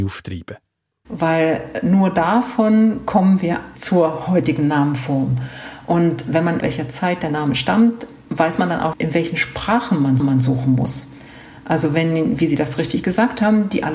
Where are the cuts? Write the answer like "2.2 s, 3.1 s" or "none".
3.8 s, 6.6 s, 8.9 s, 10.2 s